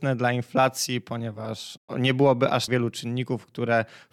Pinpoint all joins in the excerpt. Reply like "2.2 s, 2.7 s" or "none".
2.7 s